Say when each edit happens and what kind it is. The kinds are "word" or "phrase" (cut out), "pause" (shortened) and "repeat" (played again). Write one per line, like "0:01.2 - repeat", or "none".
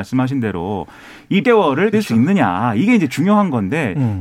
0:01.4 - word
0:01.9 - word